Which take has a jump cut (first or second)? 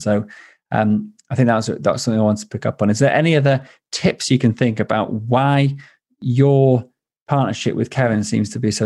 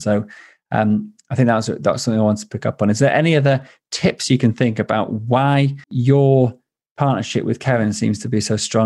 second